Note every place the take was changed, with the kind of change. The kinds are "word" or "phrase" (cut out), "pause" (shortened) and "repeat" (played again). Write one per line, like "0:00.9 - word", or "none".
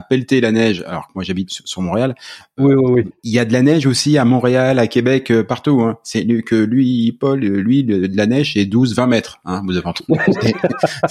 0:01.5 - word
0:03.2 - pause